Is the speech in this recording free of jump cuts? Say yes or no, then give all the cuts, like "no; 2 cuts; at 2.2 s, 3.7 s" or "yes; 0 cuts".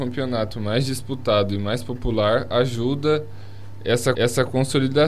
no; 1 cut; at 4.1 s